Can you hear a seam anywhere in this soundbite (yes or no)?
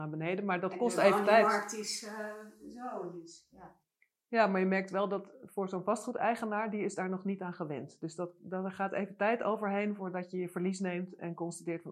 no